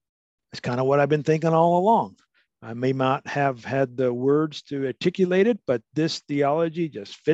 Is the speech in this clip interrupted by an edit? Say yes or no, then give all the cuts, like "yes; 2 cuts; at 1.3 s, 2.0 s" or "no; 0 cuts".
no; 0 cuts